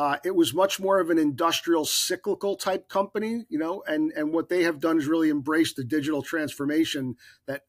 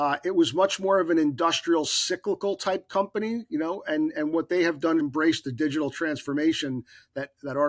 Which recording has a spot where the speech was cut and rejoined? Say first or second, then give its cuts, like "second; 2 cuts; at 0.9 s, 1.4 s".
second; 1 cut; at 5.0 s